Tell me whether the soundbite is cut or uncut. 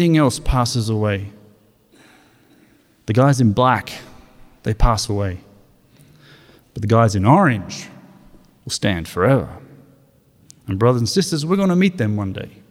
uncut